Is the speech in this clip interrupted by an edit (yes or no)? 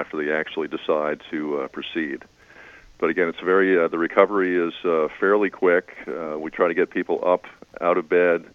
no